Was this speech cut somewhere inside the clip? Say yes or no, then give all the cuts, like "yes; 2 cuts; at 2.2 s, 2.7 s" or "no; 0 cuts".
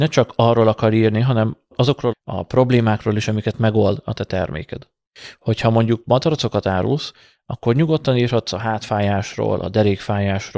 yes; 1 cut; at 2.1 s